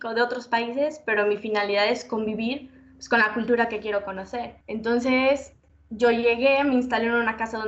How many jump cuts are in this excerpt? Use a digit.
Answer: 1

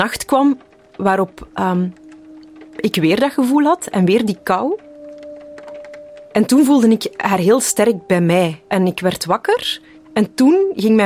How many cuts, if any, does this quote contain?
1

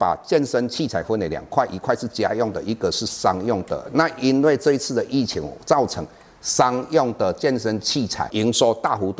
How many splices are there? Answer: 0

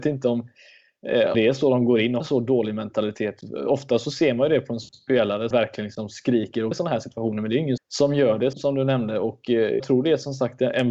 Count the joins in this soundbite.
7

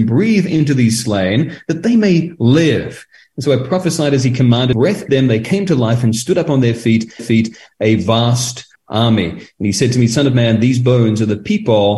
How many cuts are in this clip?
4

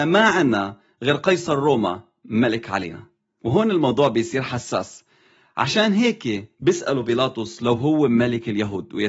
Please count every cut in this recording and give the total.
0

